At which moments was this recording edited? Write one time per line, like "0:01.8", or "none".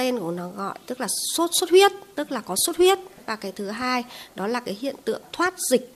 none